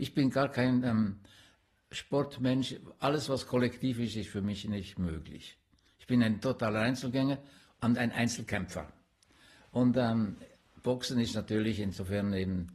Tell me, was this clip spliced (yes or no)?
no